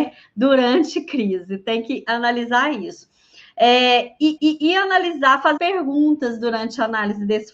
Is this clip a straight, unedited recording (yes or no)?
no